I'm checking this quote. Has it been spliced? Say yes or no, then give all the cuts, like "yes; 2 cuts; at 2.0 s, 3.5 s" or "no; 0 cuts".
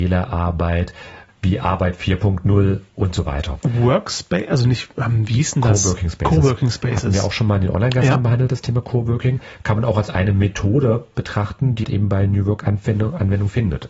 yes; 1 cut; at 11.8 s